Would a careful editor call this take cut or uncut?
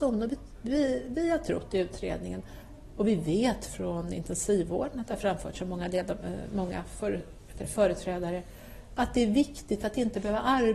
cut